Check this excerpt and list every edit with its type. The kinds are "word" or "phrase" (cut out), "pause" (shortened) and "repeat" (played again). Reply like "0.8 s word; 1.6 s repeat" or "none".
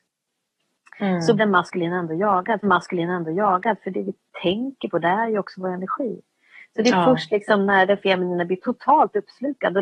1.4 s word; 2.6 s repeat